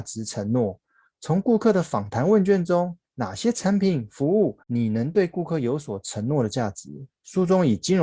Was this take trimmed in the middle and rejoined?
yes; 1 cut; at 4.6 s

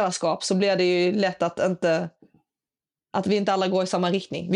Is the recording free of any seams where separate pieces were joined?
yes; 0 cuts

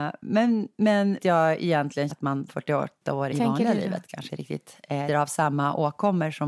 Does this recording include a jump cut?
yes; 6 cuts; at 1.2 s, 2.1 s, 2.5 s, 3.3 s, 4.3 s, 5.1 s

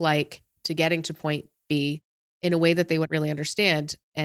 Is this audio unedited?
yes; 0 cuts

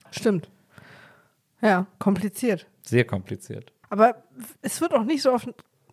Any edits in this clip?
yes; 1 cut; at 3.8 s

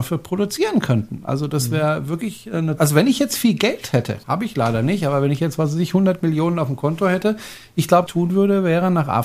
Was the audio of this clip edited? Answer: yes; 3 cuts; at 2.8 s, 4.2 s, 8.1 s

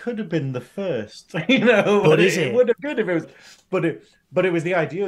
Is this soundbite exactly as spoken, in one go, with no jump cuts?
no; 2 cuts; at 2.8 s, 3.2 s

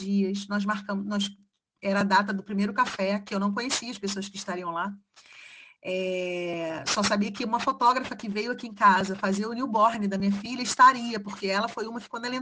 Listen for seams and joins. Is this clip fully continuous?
yes; 0 cuts

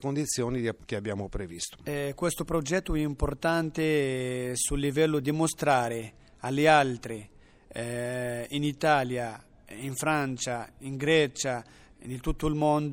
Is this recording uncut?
yes; 0 cuts

